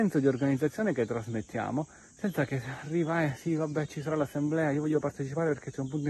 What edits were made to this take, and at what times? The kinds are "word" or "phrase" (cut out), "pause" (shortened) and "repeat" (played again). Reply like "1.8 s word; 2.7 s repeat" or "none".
none